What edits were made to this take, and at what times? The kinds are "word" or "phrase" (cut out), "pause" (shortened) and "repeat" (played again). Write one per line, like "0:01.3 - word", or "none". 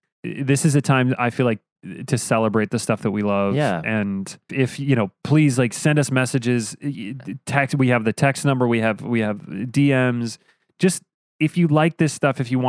0:04.5 - word